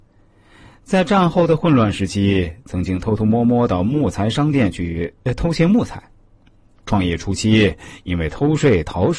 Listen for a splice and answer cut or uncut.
uncut